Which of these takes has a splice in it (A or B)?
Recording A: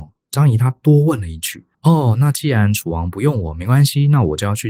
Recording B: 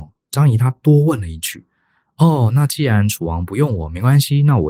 A